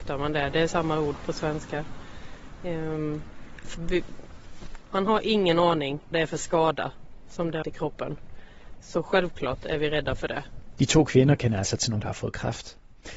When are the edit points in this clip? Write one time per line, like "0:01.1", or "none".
0:03.7
0:06.1
0:07.6
0:12.0